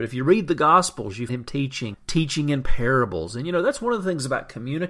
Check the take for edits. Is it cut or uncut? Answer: cut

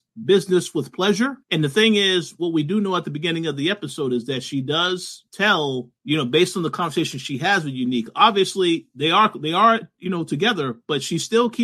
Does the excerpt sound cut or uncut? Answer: cut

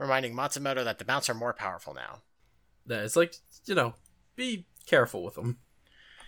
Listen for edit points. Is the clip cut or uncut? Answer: uncut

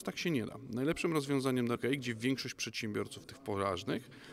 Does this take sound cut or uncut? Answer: cut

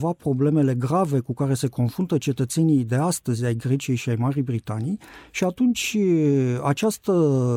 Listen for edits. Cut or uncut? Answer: uncut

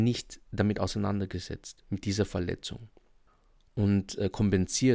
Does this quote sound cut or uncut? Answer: uncut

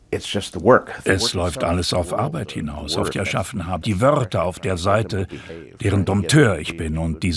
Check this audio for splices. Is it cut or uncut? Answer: cut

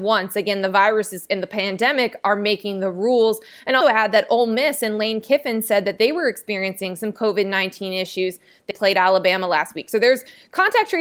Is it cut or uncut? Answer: cut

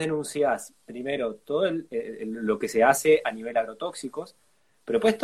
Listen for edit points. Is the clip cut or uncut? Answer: uncut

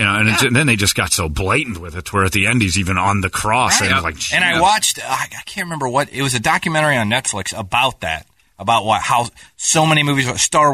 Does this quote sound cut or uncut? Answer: uncut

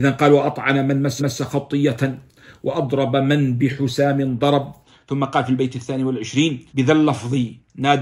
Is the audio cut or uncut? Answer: cut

